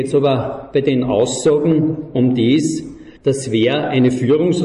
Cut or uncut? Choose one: cut